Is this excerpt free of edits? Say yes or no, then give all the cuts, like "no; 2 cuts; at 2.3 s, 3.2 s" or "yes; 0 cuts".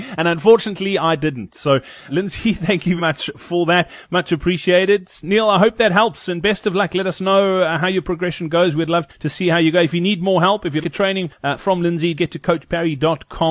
no; 6 cuts; at 2.1 s, 3.0 s, 9.1 s, 10.8 s, 11.3 s, 12.2 s